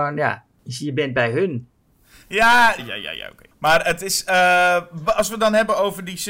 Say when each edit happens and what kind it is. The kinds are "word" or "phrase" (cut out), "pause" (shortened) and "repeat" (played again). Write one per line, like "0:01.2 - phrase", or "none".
0:02.8 - word
0:05.1 - word

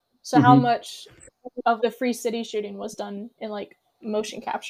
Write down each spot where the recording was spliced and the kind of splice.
0:01.8 - word

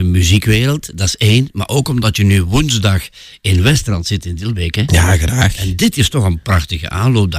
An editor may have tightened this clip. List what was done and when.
none

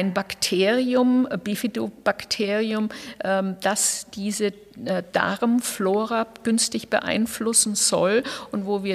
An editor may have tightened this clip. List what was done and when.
none

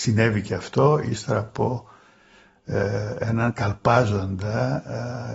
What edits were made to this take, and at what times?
none

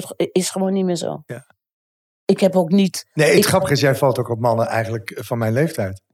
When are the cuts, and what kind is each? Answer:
none

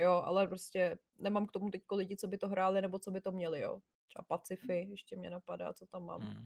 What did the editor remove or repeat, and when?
0:01.1 - pause

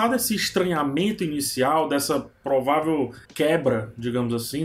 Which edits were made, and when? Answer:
0:03.2 - pause

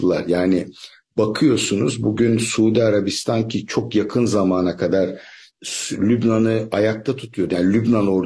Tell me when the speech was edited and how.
none

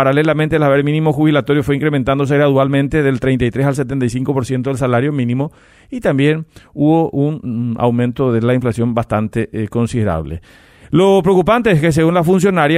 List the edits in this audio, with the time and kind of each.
none

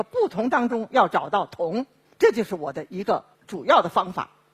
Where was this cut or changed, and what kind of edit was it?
0:02.0 - pause
0:03.3 - pause

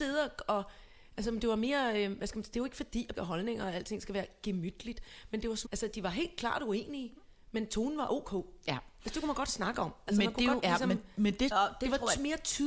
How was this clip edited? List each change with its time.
0:03.1 - word
0:05.6 - word
0:10.6 - phrase
0:11.5 - word

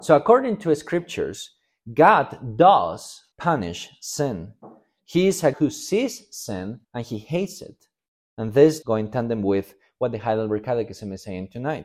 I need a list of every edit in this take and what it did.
0:03.3 - pause
0:05.5 - word
0:06.8 - pause
0:08.1 - pause
0:08.8 - word

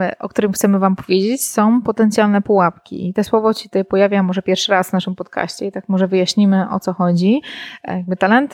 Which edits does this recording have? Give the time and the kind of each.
none

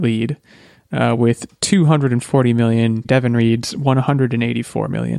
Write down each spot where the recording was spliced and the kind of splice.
0:03.0 - word

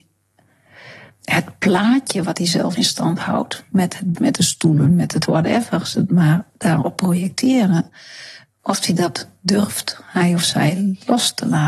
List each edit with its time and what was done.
0:02.7 - word
0:04.1 - word
0:05.2 - phrase

